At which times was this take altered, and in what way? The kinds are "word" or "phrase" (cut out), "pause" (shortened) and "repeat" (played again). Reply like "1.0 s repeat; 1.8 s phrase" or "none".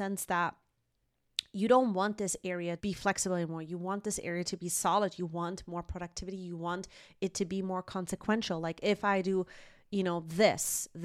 2.8 s word